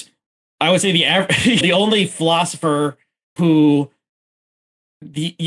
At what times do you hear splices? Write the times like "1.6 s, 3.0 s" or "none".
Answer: 1.6 s, 3.4 s